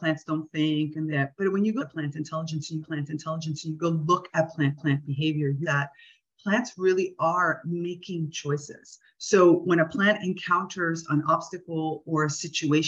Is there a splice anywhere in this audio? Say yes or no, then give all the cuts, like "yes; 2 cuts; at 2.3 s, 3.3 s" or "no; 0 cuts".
yes; 5 cuts; at 1.1 s, 1.8 s, 2.8 s, 4.8 s, 5.6 s